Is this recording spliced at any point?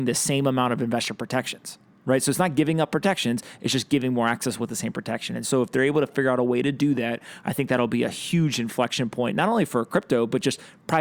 no; 0 cuts

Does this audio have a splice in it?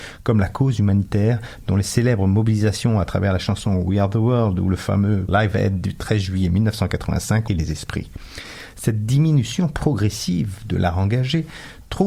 yes; 2 cuts; at 5.3 s, 7.5 s

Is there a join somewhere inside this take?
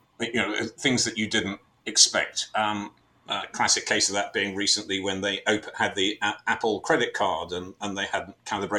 no; 0 cuts

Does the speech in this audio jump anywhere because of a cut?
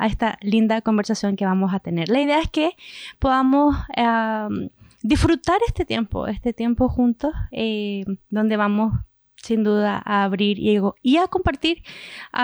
no; 0 cuts

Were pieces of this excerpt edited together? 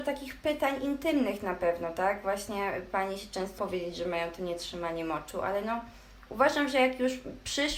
yes; 1 cut; at 3.6 s

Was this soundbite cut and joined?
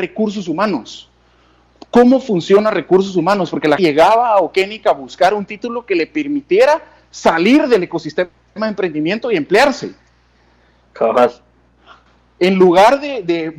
yes; 1 cut; at 3.8 s

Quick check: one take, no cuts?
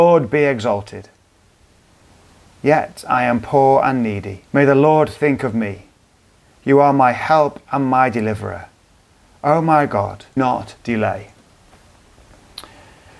no; 2 cuts; at 4.4 s, 10.4 s

